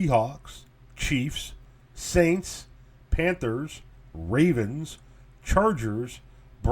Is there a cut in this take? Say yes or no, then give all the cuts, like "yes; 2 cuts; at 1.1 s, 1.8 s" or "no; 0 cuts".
no; 0 cuts